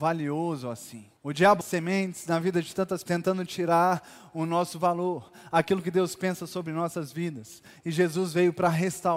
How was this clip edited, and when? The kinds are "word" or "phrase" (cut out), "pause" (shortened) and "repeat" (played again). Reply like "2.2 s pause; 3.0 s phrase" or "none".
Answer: 1.2 s pause; 1.6 s word; 3.1 s word

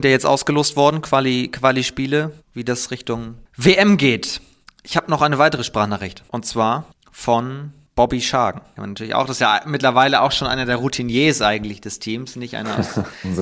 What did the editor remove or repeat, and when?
2.4 s pause; 4.6 s pause; 6.3 s pause

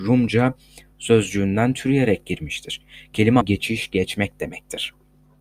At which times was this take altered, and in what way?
0.9 s word; 3.4 s word

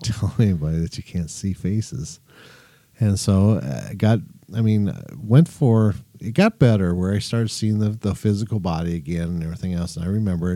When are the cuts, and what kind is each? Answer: none

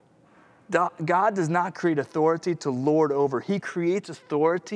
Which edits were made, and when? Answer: none

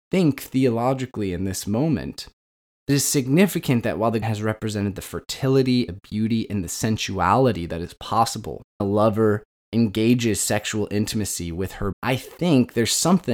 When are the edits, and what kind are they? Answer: 2.9 s word; 4.2 s word; 5.9 s word; 8.8 s word; 11.9 s word

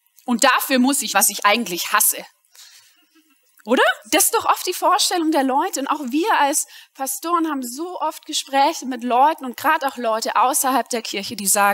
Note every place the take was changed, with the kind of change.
1.1 s word; 4.0 s pause

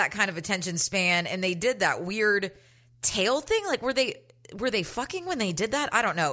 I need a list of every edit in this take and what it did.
none

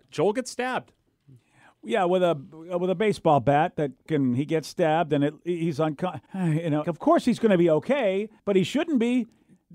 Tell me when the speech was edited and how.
4.1 s word; 6.3 s pause; 6.8 s word; 8.4 s pause

